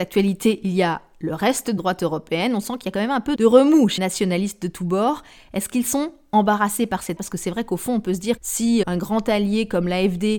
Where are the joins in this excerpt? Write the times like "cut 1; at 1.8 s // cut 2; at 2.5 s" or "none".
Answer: cut 1; at 1.8 s // cut 2; at 3.4 s // cut 3; at 4.0 s // cut 4; at 7.2 s // cut 5; at 8.4 s // cut 6; at 8.8 s